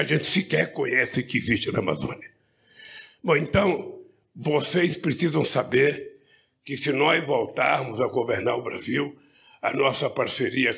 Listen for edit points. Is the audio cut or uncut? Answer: uncut